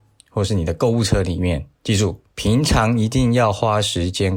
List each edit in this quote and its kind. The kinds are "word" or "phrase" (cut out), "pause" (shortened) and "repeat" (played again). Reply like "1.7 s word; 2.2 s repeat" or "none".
1.7 s pause; 2.3 s pause